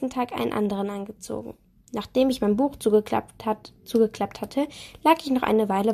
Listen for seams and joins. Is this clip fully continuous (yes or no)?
yes